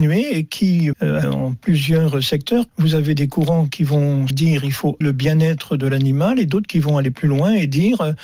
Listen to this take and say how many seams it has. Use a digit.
5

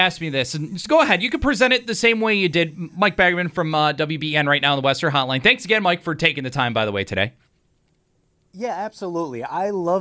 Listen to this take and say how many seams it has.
0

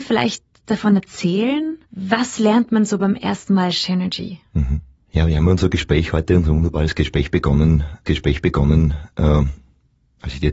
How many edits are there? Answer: 3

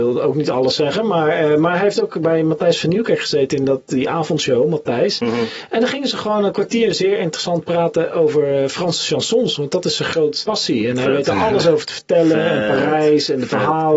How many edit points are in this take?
1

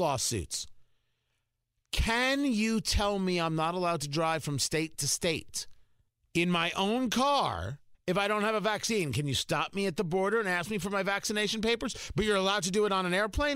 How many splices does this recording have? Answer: 2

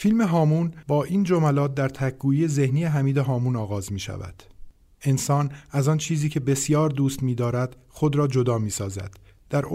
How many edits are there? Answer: 0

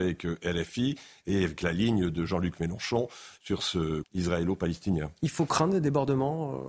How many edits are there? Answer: 1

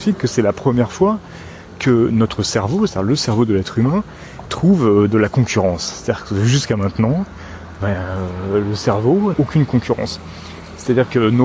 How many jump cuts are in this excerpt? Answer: 3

